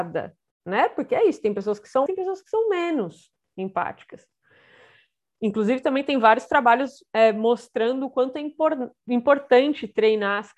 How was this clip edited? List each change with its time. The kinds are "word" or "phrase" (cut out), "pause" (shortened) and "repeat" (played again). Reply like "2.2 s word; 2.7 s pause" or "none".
2.1 s word